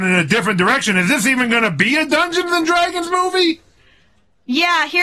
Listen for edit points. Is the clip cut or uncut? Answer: uncut